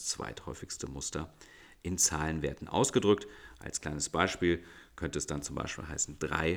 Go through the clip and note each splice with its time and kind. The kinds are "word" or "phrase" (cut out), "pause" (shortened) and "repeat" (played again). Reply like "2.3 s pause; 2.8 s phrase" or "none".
none

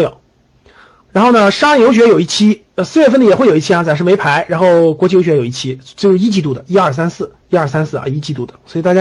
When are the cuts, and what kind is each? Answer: 2.7 s pause; 7.4 s pause

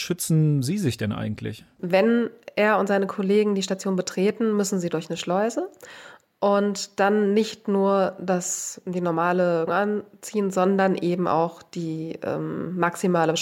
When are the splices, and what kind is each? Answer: 9.7 s word

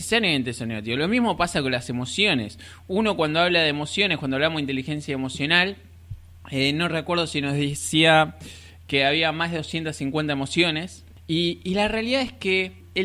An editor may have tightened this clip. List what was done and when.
none

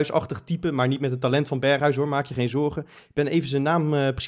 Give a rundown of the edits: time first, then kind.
3.0 s pause

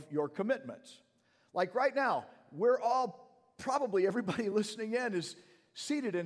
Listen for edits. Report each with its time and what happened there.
none

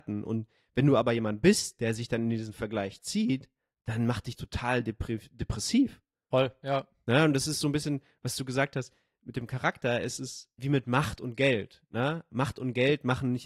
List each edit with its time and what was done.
4.4 s word; 10.6 s word

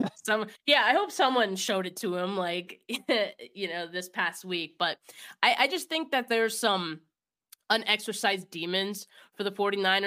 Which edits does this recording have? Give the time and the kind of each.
none

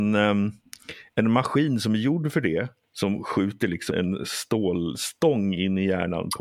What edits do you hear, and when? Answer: 2.8 s pause; 3.9 s word

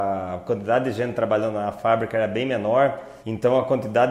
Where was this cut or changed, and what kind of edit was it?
3.2 s pause

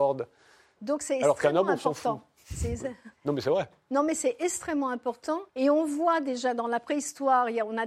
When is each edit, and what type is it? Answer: 3.1 s pause; 5.5 s pause

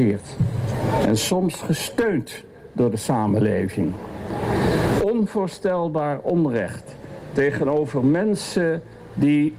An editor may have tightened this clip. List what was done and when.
none

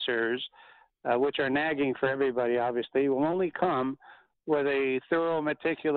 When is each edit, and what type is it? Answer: none

